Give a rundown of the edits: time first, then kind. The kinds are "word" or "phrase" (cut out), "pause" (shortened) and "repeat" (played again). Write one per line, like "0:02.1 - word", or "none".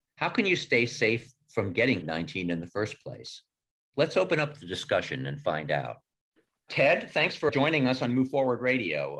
0:02.0 - word
0:07.5 - word